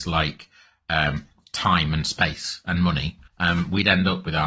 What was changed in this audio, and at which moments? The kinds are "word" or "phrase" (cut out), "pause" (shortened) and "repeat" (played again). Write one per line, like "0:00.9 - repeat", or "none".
0:03.3 - pause

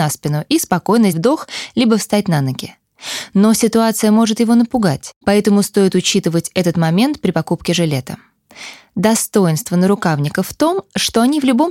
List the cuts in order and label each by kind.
0:01.1 - word
0:05.2 - pause

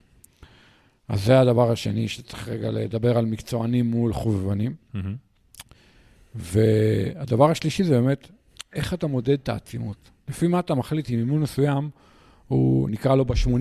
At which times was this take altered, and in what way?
none

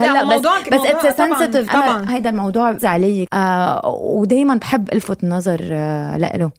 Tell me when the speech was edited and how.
0:01.7 - word
0:02.1 - word
0:02.8 - word
0:03.3 - word

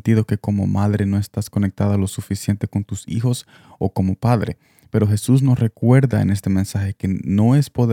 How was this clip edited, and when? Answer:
none

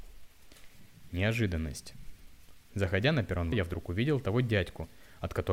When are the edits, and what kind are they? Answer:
0:02.7 - pause
0:03.5 - word

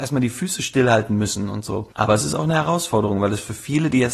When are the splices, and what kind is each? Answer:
0:01.9 - pause

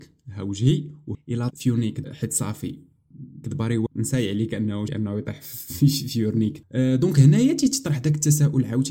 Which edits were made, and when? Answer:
0:01.1 - word
0:01.5 - word
0:02.0 - word
0:03.4 - word
0:03.9 - word
0:04.9 - word
0:06.6 - word

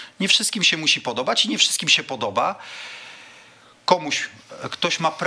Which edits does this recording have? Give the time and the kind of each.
none

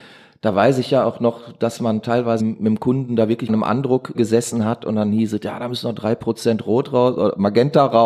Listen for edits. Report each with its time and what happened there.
0:02.4 - word
0:03.5 - phrase
0:04.1 - word

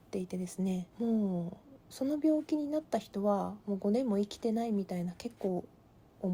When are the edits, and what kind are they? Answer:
0:00.9 - pause

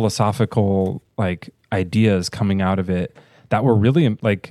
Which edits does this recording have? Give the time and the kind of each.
none

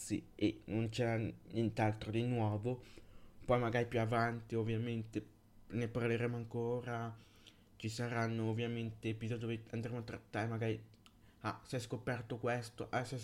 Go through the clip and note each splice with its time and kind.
none

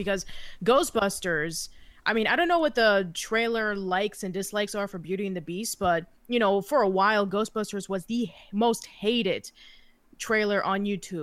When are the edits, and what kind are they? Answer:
0:06.2 - pause

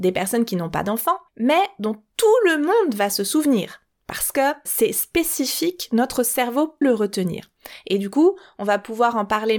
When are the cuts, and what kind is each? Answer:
0:01.3 - pause
0:04.6 - word
0:06.8 - word

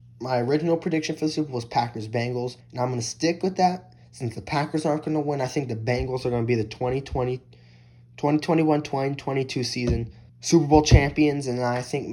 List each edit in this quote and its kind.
0:02.6 - pause
0:04.0 - pause
0:10.3 - pause

